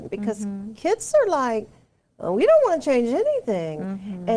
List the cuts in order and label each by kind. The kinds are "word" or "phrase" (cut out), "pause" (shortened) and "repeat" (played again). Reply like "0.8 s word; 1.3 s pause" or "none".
none